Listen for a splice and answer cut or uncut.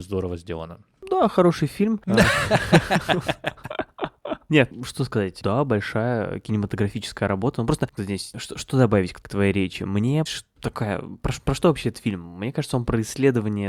cut